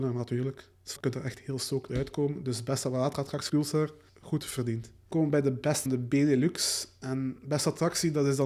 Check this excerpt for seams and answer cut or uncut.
cut